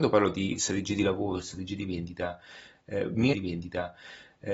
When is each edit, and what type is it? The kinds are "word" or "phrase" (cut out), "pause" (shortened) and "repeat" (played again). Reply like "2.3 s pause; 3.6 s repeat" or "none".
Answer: 3.3 s repeat